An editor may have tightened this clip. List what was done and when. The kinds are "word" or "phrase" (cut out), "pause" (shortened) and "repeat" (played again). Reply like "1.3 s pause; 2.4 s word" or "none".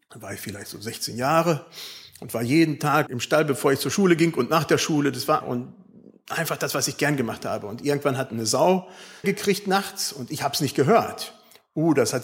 3.1 s word; 5.4 s word; 9.2 s phrase